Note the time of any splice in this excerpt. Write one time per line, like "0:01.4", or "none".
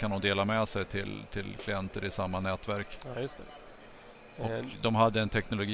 none